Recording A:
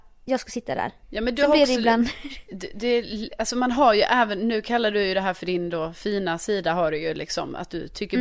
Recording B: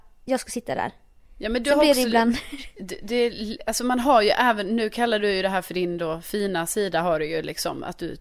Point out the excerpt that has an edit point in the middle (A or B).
A